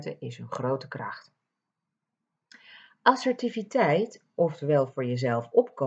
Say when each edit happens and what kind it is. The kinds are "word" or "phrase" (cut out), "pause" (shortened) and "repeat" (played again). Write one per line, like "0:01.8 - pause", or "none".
none